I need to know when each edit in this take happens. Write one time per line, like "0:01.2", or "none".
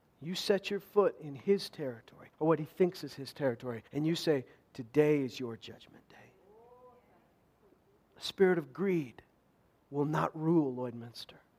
0:02.3
0:03.9
0:07.6